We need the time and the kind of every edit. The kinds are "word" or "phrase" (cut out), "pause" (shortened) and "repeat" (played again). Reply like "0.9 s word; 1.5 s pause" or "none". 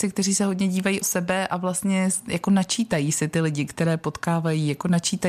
1.0 s word